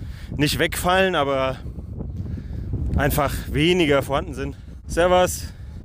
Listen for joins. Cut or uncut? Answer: uncut